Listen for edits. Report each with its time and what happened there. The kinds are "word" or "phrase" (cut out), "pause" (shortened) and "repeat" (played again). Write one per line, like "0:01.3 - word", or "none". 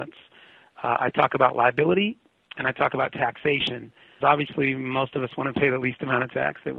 0:04.2 - word